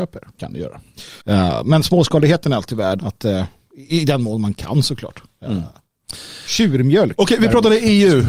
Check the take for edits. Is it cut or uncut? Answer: cut